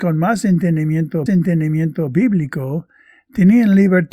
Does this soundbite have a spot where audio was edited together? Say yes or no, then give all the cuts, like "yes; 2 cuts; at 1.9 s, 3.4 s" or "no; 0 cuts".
yes; 1 cut; at 1.3 s